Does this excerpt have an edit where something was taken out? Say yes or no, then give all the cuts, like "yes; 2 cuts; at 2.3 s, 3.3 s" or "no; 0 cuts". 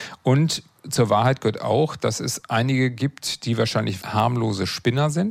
yes; 1 cut; at 4.0 s